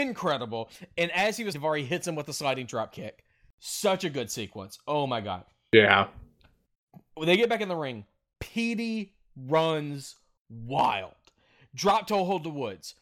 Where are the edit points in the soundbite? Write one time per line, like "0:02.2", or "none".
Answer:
0:01.5